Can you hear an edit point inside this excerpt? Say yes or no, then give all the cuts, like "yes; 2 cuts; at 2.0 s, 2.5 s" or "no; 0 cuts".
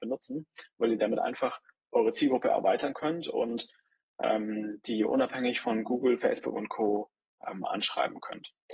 no; 0 cuts